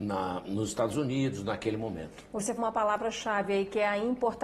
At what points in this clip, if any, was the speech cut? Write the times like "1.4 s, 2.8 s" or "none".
2.6 s